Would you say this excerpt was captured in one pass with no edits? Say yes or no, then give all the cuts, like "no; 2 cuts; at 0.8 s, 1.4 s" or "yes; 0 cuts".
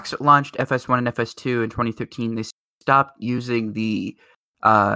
no; 1 cut; at 2.7 s